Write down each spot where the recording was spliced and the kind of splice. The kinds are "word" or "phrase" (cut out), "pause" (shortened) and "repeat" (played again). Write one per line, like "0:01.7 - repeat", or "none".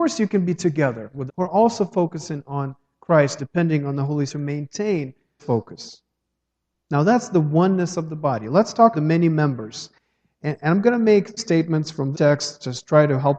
0:01.3 - word
0:03.4 - word
0:04.3 - word
0:05.4 - word
0:08.9 - word
0:11.4 - word
0:12.1 - word